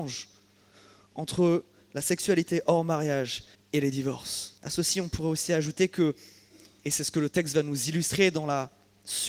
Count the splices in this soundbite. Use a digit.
2